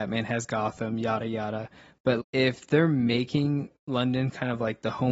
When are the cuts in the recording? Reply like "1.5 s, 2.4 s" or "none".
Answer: 2.2 s